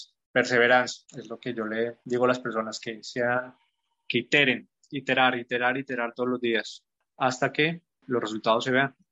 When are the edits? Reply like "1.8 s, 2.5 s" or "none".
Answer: none